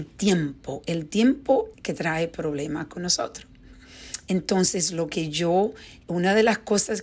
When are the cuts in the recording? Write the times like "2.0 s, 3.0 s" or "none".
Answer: 1.7 s